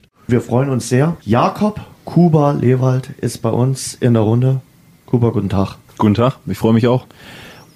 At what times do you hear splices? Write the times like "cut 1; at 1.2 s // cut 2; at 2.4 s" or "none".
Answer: cut 1; at 1.2 s